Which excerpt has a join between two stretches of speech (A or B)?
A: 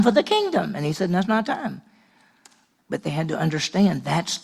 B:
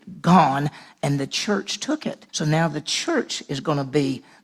B